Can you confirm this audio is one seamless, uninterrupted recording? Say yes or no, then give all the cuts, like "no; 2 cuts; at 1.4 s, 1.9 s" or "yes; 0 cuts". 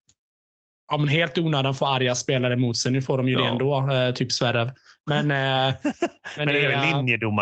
yes; 0 cuts